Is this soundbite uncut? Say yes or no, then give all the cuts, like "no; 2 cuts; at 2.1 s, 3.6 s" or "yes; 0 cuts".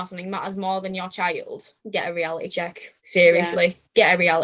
no; 2 cuts; at 1.8 s, 3.0 s